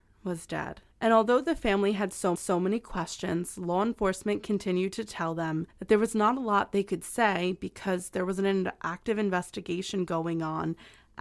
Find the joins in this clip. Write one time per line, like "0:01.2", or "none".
0:00.9
0:02.3
0:05.7

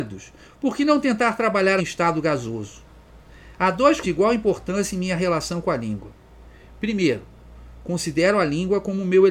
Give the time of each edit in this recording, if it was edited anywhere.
0:01.8
0:04.0

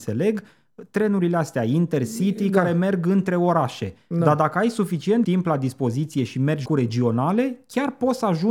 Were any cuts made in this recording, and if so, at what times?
0:05.2
0:06.7

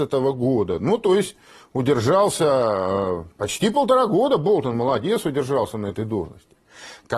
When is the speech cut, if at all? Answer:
0:03.3

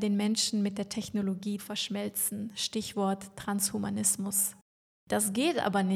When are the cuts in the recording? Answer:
0:01.6
0:04.9

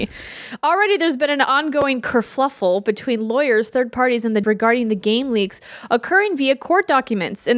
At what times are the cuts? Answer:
0:04.4

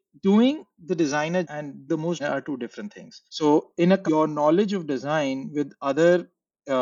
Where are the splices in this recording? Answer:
0:01.4
0:01.9
0:02.2
0:03.3
0:04.1

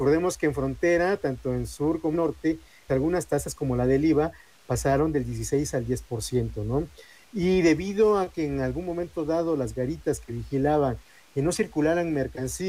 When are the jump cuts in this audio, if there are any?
0:02.1
0:02.9

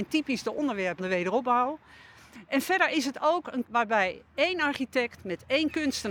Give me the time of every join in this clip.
0:01.0
0:03.6
0:05.2

